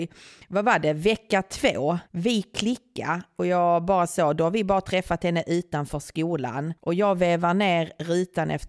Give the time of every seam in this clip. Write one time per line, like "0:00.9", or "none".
0:02.1
0:06.8